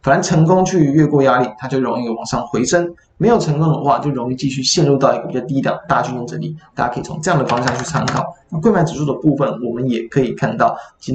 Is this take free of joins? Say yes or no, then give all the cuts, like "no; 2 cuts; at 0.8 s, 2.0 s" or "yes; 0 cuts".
yes; 0 cuts